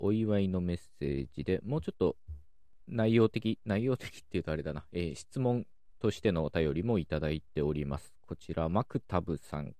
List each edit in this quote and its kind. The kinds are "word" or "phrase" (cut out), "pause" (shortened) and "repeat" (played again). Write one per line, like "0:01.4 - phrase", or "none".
none